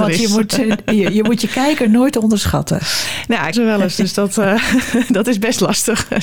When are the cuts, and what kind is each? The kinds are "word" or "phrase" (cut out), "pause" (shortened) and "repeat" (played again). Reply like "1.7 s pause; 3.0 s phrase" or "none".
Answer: 3.5 s phrase